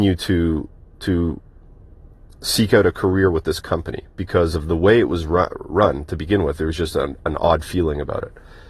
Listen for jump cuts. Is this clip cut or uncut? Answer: uncut